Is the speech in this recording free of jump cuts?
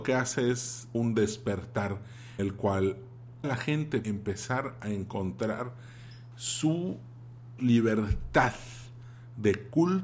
no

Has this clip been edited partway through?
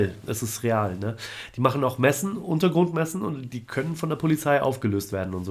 no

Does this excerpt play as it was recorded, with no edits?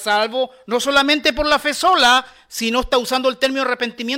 yes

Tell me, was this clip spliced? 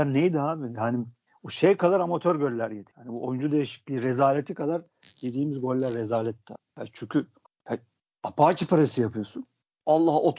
no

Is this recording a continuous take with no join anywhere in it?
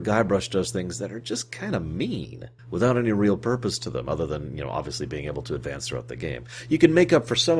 no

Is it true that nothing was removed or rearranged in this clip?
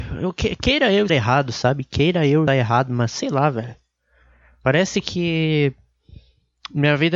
no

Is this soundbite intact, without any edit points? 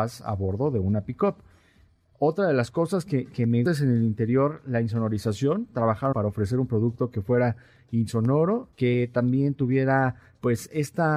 no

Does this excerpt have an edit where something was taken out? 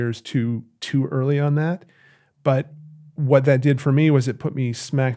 no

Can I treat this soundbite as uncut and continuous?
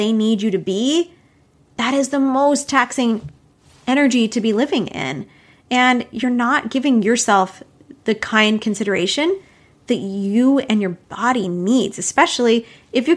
yes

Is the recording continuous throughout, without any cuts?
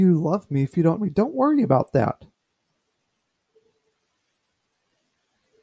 no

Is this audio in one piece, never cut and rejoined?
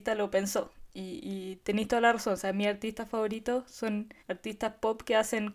no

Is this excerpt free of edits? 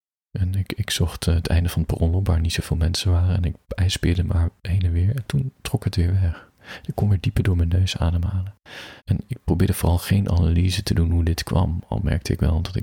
no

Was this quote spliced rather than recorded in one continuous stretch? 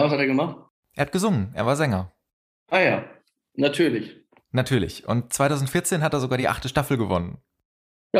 no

